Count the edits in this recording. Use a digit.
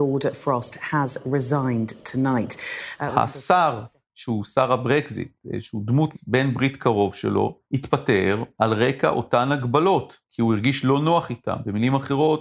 4